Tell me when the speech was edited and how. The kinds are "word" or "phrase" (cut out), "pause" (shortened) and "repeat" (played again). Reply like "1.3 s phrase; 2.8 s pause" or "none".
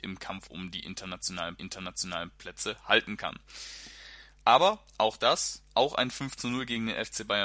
1.6 s repeat